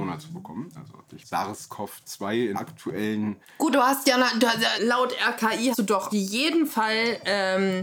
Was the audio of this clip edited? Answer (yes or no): yes